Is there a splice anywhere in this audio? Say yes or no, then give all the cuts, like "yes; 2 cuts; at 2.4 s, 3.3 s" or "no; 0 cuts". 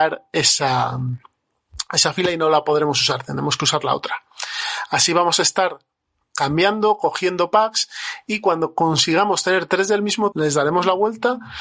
yes; 1 cut; at 10.3 s